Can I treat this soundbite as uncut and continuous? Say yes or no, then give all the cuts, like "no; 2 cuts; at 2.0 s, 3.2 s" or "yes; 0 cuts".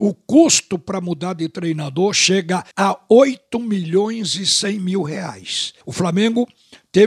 no; 2 cuts; at 2.7 s, 5.8 s